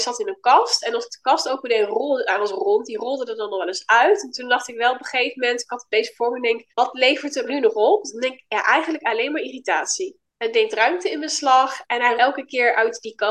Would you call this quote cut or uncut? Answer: cut